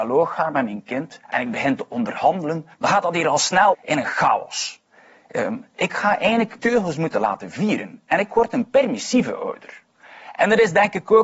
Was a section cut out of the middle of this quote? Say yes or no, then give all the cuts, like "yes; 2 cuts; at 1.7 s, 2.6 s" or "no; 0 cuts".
yes; 4 cuts; at 1.2 s, 2.7 s, 3.7 s, 6.6 s